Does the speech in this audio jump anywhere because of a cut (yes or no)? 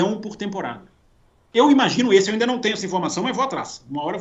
no